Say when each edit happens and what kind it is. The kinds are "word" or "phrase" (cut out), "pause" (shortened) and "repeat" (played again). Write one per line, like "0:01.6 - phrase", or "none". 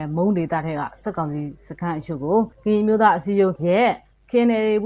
0:02.5 - pause
0:03.6 - word